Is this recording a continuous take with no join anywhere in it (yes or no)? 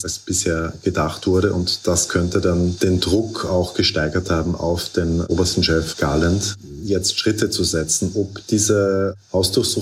yes